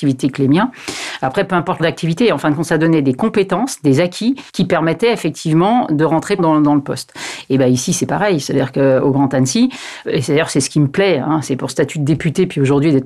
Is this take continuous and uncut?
no; 5 cuts; at 1.8 s, 4.5 s, 6.4 s, 10.0 s, 11.7 s

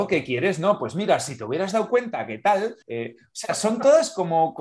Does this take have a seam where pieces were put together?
yes; 1 cut; at 2.8 s

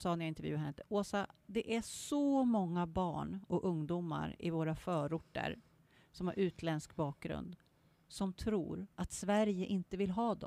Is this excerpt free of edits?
yes; 0 cuts

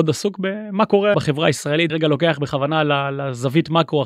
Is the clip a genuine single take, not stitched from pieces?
no; 2 cuts; at 1.1 s, 1.9 s

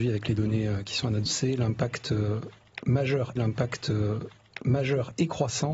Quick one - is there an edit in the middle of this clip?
yes; 2 cuts; at 1.3 s, 3.4 s

